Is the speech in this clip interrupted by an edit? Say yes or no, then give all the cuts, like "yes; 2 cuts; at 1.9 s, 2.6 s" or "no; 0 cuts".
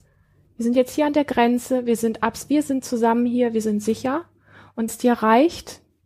yes; 1 cut; at 4.9 s